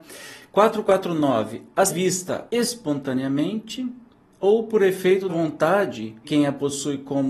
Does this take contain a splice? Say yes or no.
yes